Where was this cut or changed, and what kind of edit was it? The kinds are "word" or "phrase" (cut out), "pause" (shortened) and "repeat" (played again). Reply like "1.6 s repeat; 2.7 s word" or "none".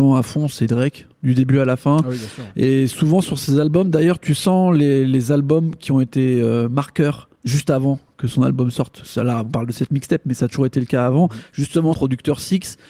1.1 s pause; 7.4 s pause; 11.9 s word